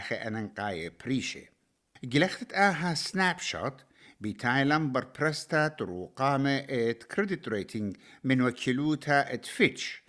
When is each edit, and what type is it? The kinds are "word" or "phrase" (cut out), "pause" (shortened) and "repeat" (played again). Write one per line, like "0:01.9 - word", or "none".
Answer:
none